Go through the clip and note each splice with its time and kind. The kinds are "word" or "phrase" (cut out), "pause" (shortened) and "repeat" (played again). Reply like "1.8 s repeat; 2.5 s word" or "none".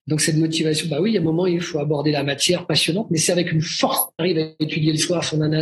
4.2 s phrase